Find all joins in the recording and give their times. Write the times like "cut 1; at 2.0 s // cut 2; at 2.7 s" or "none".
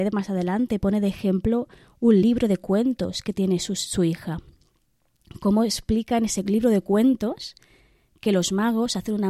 none